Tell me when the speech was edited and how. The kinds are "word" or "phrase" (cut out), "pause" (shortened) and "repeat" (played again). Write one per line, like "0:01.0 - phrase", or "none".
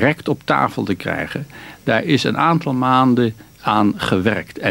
none